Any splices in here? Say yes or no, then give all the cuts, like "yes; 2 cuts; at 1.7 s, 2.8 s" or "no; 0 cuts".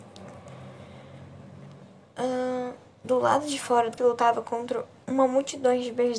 yes; 1 cut; at 4.0 s